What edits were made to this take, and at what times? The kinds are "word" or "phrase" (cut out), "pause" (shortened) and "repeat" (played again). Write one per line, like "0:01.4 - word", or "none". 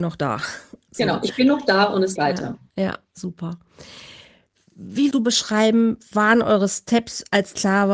0:02.2 - word
0:05.1 - word